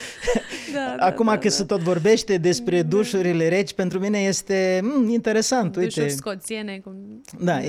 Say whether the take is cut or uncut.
uncut